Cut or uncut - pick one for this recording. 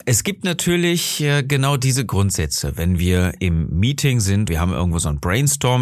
cut